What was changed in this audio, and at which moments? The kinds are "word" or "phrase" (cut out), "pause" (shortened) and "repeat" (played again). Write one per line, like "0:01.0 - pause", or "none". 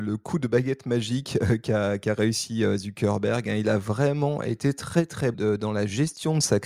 0:05.3 - word